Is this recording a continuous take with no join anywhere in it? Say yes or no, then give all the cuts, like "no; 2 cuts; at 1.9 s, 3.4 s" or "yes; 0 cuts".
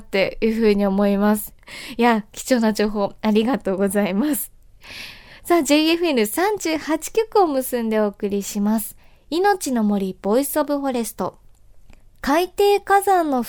no; 1 cut; at 12.0 s